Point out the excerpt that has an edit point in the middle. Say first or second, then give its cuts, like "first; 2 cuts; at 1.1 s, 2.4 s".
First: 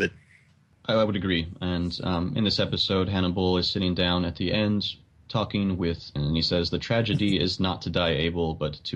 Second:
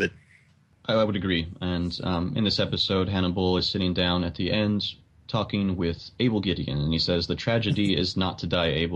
first; 1 cut; at 6.2 s